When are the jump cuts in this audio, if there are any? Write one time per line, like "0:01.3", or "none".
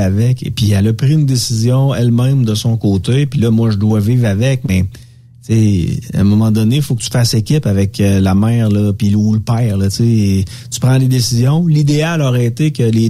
none

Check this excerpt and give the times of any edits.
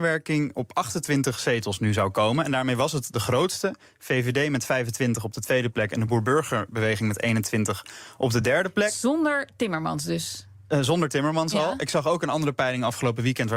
none

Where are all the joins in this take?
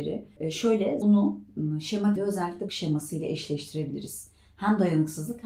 0:01.0
0:02.2
0:02.7

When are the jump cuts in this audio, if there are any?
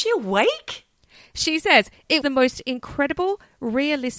0:02.2

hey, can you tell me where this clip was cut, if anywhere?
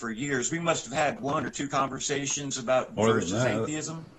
0:01.2
0:03.0

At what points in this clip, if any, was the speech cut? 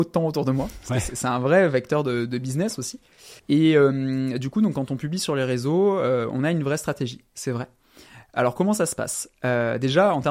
0:03.4

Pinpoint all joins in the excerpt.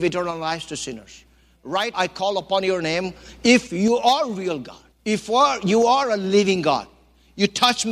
0:01.9
0:04.9

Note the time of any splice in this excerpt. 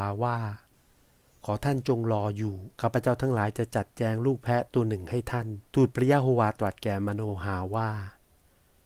0:02.7
0:05.7

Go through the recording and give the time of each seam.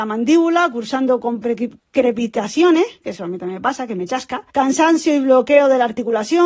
0:01.8
0:04.5

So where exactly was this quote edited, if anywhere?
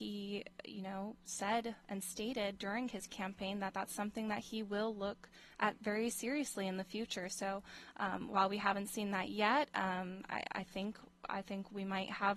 none

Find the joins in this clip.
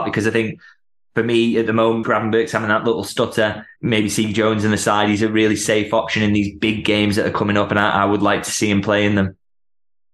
0:02.0
0:03.8

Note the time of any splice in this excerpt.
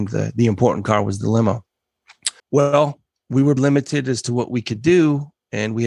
0:02.4
0:03.6

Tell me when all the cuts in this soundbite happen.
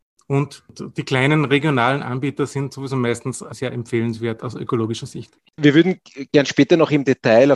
none

